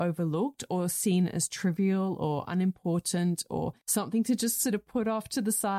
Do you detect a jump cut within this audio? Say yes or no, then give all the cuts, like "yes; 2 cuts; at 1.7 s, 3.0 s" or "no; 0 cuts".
yes; 1 cut; at 3.8 s